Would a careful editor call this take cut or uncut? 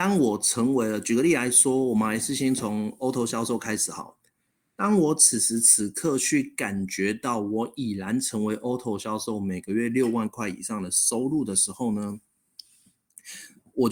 uncut